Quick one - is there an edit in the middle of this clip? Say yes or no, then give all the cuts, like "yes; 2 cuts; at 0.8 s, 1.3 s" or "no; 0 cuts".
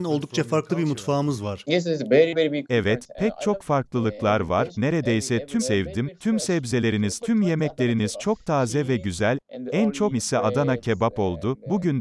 yes; 4 cuts; at 4.7 s, 5.6 s, 7.2 s, 10.1 s